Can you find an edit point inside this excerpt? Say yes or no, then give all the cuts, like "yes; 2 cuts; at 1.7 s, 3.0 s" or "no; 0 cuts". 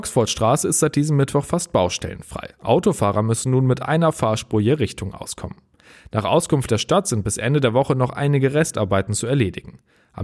no; 0 cuts